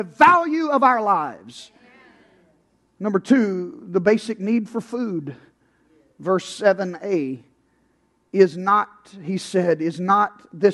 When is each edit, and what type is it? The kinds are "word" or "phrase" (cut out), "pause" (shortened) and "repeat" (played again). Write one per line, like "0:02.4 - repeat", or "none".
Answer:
none